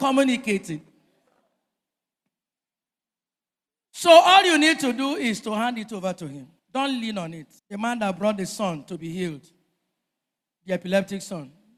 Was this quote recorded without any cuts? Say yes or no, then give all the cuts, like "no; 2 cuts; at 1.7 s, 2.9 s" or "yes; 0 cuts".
no; 2 cuts; at 6.6 s, 7.6 s